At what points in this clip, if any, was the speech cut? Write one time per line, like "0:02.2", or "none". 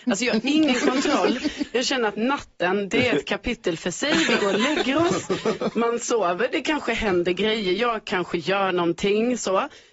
none